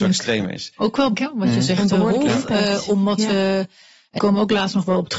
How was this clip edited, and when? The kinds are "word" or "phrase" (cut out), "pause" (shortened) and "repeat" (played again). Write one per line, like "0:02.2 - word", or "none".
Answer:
0:01.1 - word
0:04.2 - word